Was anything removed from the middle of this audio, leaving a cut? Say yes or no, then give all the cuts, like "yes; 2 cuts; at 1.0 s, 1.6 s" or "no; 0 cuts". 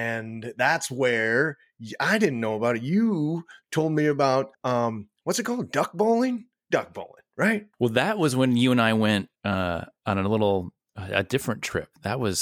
yes; 3 cuts; at 4.5 s, 7.7 s, 9.4 s